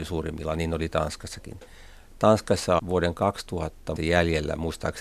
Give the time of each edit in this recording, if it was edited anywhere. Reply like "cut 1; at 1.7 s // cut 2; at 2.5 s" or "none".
cut 1; at 2.8 s // cut 2; at 4.0 s